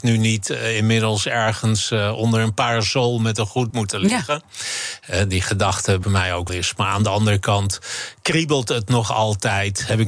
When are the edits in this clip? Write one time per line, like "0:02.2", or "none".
0:03.7
0:06.0
0:06.5